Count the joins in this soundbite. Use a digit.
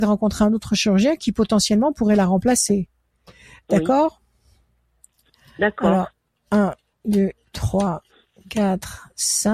0